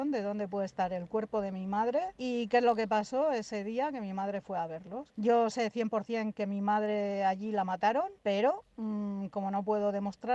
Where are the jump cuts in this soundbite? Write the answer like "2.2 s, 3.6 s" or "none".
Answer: none